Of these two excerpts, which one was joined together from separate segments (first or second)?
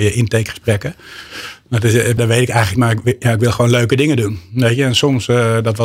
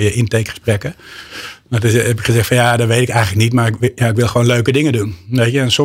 first